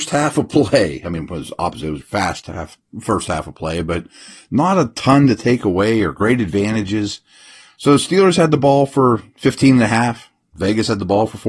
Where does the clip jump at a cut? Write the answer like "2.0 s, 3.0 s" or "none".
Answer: 2.0 s